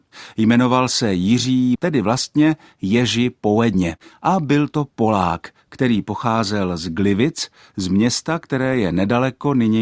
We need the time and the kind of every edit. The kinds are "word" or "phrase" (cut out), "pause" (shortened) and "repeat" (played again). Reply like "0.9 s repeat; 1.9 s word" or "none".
1.8 s word